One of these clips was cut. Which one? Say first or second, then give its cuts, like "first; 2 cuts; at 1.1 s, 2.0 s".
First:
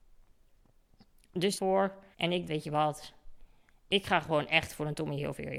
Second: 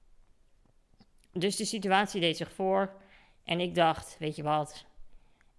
first; 3 cuts; at 1.6 s, 2.1 s, 2.5 s